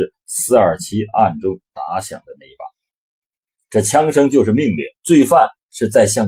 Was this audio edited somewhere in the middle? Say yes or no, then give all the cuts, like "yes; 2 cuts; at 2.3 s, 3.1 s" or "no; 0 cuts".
yes; 1 cut; at 5.0 s